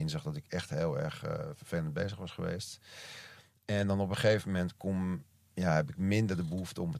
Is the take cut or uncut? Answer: uncut